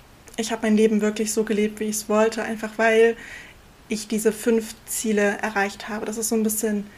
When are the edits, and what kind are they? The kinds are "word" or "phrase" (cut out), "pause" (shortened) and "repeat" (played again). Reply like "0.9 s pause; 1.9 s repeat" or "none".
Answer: none